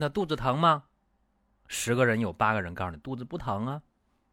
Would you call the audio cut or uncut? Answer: uncut